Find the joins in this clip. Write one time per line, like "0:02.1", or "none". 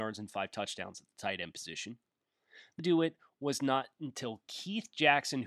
0:02.8